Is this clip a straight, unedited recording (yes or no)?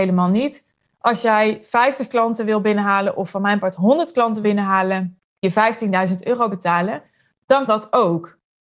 no